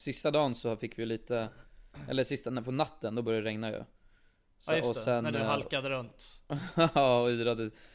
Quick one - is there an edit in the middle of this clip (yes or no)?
no